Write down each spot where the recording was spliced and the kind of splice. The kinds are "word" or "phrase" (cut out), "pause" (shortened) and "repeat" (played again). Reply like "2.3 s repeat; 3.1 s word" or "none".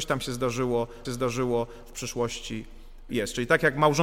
1.0 s repeat; 3.1 s word